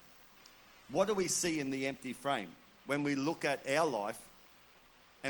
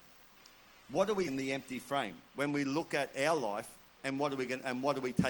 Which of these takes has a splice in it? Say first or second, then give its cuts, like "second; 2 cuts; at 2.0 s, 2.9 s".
second; 3 cuts; at 1.3 s, 2.3 s, 3.9 s